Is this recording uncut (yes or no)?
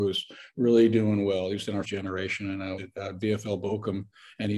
no